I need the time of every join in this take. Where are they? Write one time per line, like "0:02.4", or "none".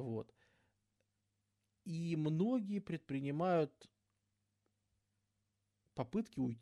none